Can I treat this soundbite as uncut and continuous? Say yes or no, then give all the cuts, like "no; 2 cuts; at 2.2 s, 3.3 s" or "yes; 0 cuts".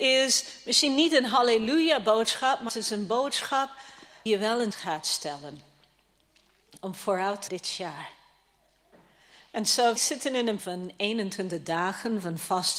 no; 6 cuts; at 2.7 s, 4.3 s, 4.7 s, 7.5 s, 10.0 s, 10.6 s